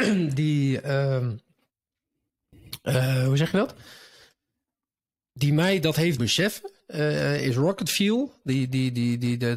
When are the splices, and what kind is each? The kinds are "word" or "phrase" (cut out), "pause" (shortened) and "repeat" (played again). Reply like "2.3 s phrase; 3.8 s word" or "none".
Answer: 6.2 s word